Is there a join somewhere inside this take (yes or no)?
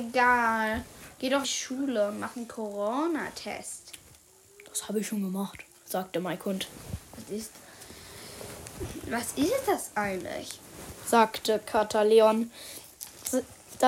yes